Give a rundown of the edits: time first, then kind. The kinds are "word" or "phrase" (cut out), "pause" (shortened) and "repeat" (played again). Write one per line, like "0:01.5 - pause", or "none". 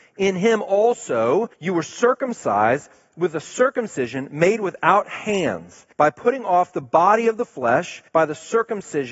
0:01.5 - pause
0:05.9 - pause
0:08.1 - pause

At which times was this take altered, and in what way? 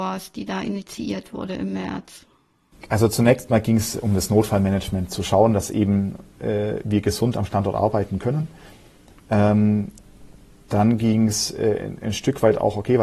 none

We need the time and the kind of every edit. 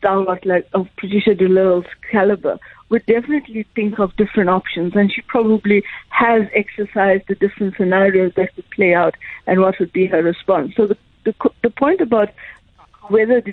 none

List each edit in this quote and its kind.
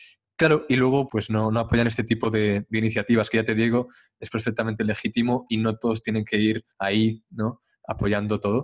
0:01.1 - word
0:06.7 - pause

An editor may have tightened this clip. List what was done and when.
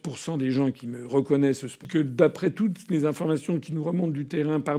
none

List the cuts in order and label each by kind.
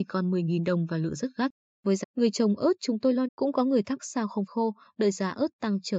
0:02.0 - word
0:03.3 - word
0:04.0 - word
0:04.5 - word

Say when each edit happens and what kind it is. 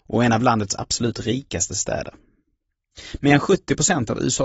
none

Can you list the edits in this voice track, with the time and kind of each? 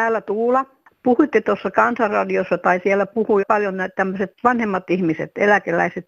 0:03.4 - word

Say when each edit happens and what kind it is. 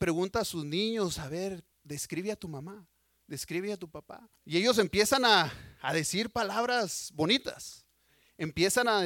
0:01.7 - pause
0:04.4 - pause

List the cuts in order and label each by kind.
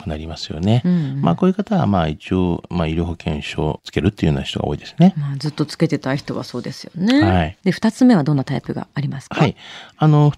0:07.6 - pause

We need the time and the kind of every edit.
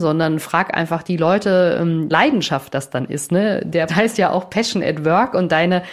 0:02.1 - word
0:03.9 - word

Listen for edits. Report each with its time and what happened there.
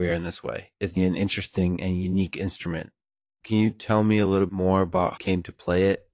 0:01.0 - word
0:04.5 - word
0:05.2 - phrase

